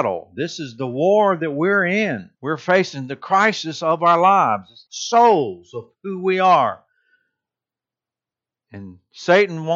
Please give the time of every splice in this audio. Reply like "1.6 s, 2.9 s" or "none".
2.3 s, 4.9 s, 5.9 s